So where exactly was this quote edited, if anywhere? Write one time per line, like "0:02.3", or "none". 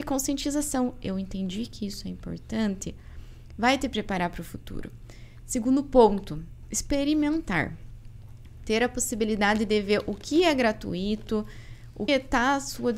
0:12.1